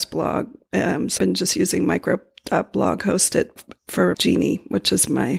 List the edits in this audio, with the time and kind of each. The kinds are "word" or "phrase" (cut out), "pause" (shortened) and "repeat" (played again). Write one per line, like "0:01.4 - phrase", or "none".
0:01.2 - word
0:03.6 - word
0:04.1 - word